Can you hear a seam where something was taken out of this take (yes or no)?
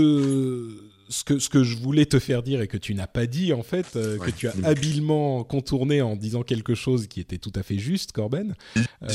no